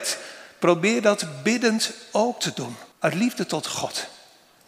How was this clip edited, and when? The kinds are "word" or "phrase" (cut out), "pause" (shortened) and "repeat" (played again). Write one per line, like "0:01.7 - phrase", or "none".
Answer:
0:02.9 - pause